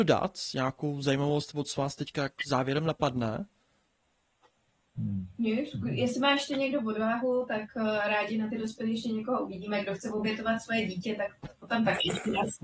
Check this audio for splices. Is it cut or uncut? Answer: uncut